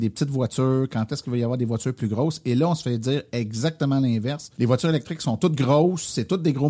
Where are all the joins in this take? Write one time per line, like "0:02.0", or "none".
0:04.5